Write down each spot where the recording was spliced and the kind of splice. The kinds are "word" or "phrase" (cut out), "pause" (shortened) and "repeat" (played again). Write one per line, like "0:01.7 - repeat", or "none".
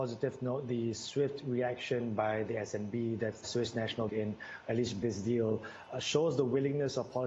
0:03.4 - word
0:04.1 - word
0:05.0 - word